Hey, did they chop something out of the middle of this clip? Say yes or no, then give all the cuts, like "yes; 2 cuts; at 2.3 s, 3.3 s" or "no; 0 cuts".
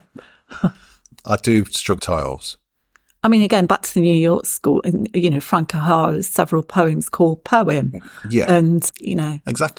yes; 2 cuts; at 2.0 s, 8.9 s